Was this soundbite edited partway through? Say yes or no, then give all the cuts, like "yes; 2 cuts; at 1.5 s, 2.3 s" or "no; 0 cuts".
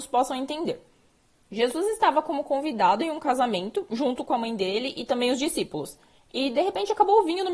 no; 0 cuts